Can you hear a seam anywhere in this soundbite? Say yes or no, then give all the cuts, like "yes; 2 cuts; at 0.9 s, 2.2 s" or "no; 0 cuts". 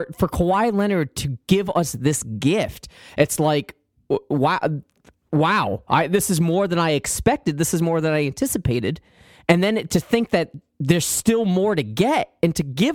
no; 0 cuts